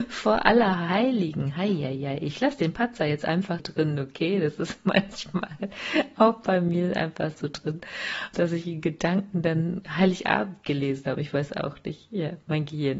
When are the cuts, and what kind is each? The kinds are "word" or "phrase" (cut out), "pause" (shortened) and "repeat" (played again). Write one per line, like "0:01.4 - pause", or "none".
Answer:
0:03.6 - word
0:08.3 - word